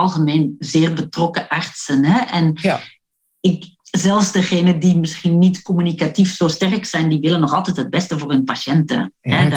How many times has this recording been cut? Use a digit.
1